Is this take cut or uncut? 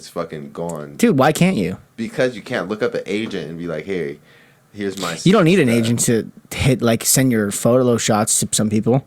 uncut